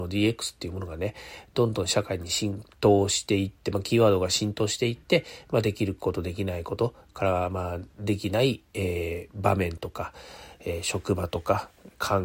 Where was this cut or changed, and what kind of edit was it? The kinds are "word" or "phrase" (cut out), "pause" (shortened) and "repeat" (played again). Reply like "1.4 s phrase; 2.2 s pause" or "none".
2.7 s pause